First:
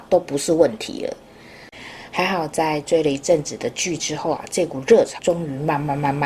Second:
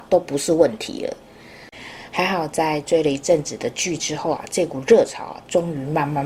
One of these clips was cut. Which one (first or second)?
first